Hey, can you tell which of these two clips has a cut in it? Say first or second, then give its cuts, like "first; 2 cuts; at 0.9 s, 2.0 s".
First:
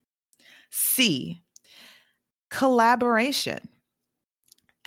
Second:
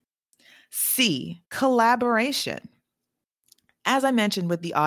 second; 1 cut; at 1.4 s